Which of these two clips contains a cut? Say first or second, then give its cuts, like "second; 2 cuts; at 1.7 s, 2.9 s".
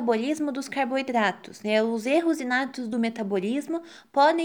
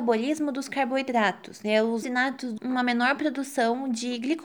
second; 2 cuts; at 2.0 s, 2.6 s